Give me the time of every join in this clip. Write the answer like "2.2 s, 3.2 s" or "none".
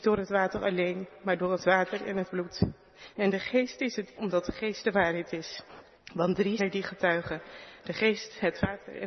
3.1 s, 4.1 s, 5.9 s, 6.6 s

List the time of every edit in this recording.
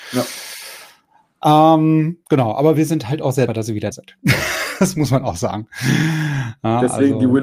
3.5 s, 3.9 s

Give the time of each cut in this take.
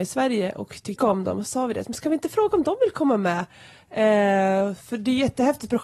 1.0 s

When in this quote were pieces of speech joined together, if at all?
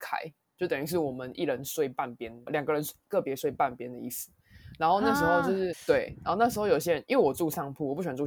2.5 s, 5.7 s

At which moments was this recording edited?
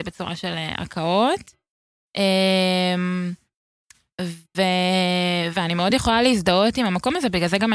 none

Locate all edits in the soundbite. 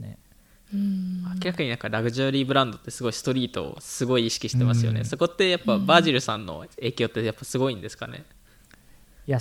6.7 s

